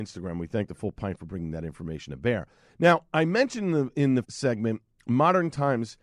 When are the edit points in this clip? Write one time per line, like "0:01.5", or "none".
0:04.2